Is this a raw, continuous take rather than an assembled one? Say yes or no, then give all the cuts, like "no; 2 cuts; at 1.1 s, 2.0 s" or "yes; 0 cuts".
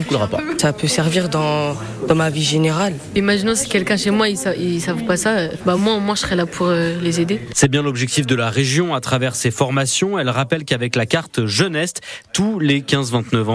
yes; 0 cuts